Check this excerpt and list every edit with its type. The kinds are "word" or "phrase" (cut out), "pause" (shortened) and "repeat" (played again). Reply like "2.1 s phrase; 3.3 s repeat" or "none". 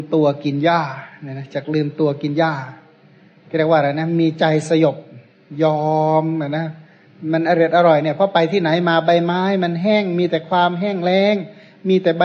none